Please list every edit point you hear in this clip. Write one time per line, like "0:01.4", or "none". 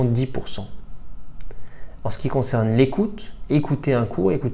none